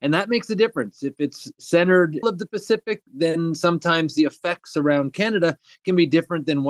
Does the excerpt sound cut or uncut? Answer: cut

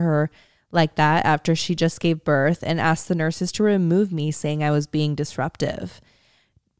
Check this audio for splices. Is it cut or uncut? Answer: uncut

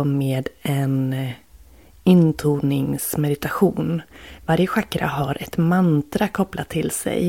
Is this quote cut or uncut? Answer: uncut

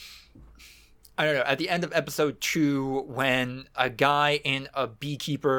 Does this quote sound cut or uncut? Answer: uncut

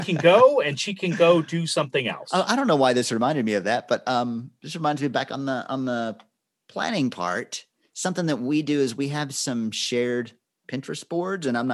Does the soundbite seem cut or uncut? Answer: uncut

